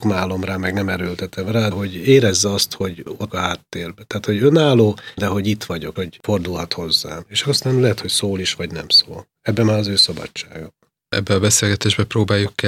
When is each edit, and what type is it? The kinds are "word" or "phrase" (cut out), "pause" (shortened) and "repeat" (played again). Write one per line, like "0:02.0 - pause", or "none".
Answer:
0:01.7 - word
0:03.3 - word
0:05.2 - word
0:06.0 - word